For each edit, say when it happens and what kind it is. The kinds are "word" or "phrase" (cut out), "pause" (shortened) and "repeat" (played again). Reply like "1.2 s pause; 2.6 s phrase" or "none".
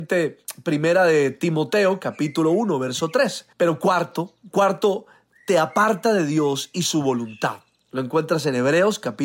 3.5 s pause